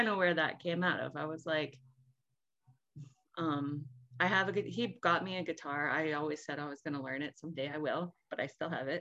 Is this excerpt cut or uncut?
uncut